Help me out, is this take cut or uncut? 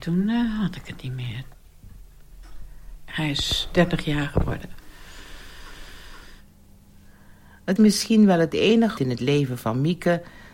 cut